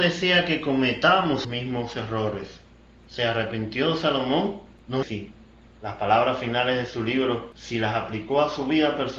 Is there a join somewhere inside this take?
yes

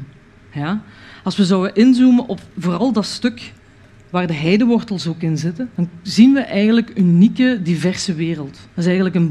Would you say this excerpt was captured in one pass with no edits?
yes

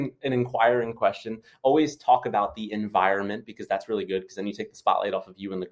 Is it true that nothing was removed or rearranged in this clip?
yes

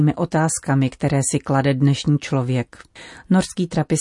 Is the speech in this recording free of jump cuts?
yes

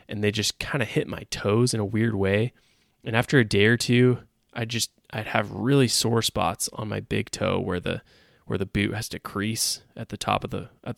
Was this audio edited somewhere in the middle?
no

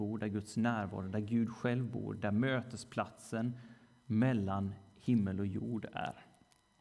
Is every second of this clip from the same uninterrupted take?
yes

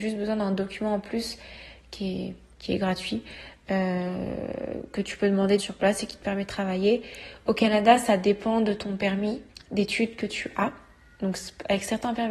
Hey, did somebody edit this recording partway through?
yes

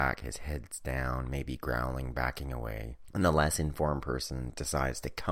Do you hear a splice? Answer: no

